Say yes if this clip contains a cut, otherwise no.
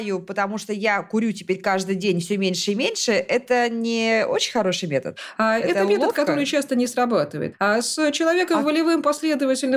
no